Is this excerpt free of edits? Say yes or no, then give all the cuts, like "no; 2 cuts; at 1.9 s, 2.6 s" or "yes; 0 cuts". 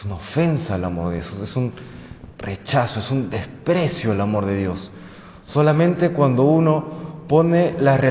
yes; 0 cuts